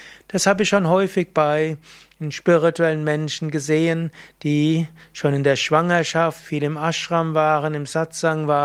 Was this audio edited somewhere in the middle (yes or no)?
no